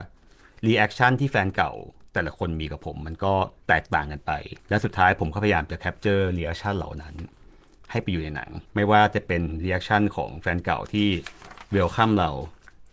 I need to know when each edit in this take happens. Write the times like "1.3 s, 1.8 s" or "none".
3.6 s, 4.6 s, 8.7 s